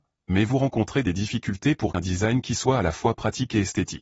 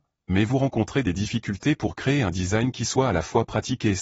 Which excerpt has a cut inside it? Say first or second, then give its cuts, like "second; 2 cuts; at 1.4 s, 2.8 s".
first; 1 cut; at 1.9 s